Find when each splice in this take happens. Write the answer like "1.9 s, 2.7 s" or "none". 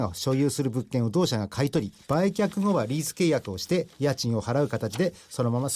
2.0 s